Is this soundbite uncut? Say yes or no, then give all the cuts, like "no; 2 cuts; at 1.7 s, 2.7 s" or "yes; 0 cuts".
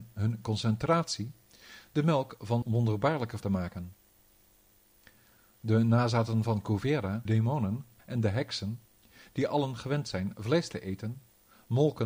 no; 5 cuts; at 2.6 s, 3.4 s, 4.7 s, 7.3 s, 8.0 s